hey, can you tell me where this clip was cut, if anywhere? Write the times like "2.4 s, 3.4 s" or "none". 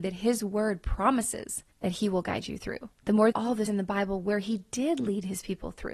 1.7 s, 3.0 s, 3.3 s, 3.7 s